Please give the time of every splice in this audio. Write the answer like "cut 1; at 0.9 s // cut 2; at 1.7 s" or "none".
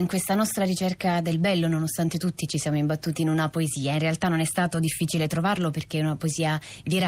none